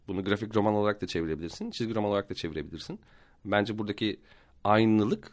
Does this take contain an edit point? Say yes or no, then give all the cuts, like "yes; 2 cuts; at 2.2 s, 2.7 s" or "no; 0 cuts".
no; 0 cuts